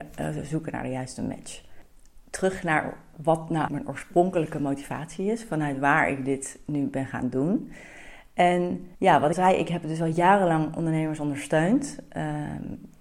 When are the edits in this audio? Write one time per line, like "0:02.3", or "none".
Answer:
0:03.7
0:08.9
0:09.3